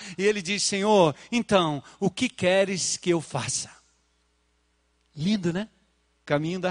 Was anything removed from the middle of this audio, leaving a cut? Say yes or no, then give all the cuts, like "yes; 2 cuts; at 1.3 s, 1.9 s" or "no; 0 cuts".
no; 0 cuts